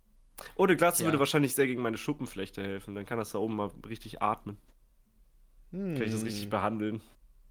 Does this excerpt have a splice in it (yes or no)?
no